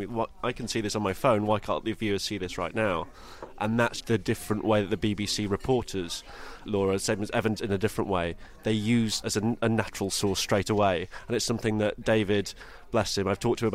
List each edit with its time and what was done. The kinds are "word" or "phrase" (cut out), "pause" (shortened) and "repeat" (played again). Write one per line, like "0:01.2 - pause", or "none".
0:04.0 - word
0:06.7 - word
0:07.6 - word
0:09.2 - word